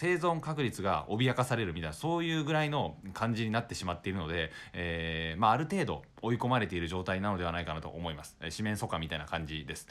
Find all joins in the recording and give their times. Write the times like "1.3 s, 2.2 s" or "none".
6.1 s